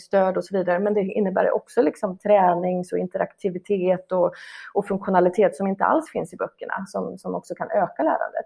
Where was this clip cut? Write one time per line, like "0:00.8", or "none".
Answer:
none